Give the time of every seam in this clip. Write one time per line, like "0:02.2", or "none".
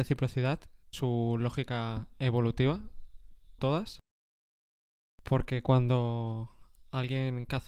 0:00.9
0:03.6